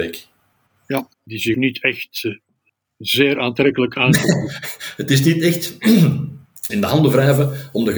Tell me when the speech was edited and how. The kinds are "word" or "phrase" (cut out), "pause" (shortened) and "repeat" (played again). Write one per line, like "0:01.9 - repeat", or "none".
0:01.1 - pause
0:01.5 - word
0:06.7 - phrase

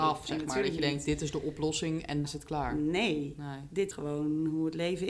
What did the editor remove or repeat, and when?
0:02.2 - word
0:03.9 - word

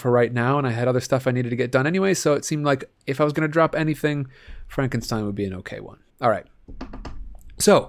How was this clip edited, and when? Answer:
0:06.1 - pause

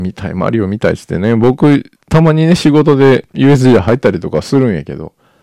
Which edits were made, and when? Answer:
none

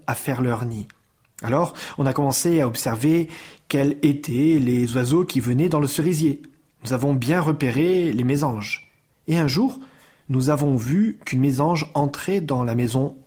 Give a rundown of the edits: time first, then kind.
none

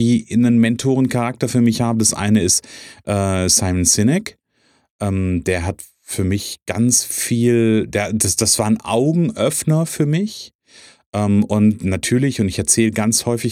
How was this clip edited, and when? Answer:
none

